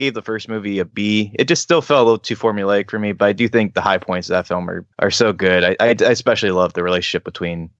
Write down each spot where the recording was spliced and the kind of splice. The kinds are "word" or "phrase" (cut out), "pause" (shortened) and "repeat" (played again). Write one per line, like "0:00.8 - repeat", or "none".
0:04.9 - pause